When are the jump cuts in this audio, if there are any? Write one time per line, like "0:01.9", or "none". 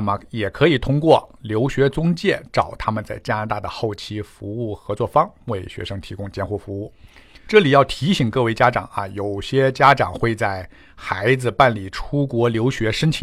none